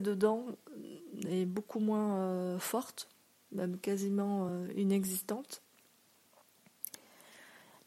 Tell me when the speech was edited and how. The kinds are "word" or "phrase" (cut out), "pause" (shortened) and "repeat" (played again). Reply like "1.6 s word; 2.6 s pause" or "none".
none